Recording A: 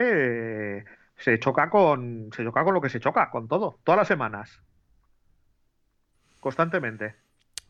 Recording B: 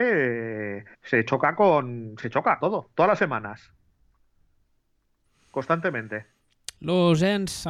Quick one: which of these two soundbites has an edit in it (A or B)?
B